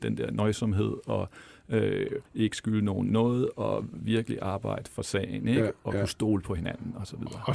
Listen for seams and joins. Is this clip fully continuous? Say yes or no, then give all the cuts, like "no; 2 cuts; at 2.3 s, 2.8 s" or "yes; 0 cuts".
no; 1 cut; at 2.3 s